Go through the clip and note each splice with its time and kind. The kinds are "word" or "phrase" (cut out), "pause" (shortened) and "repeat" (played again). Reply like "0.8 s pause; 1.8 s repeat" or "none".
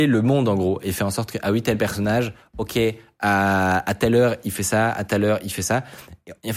none